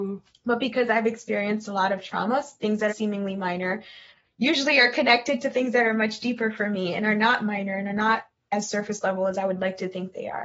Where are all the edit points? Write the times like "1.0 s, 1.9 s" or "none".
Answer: 2.9 s